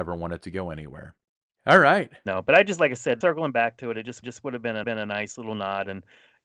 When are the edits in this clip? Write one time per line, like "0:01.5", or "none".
0:01.3
0:03.2
0:04.2
0:04.8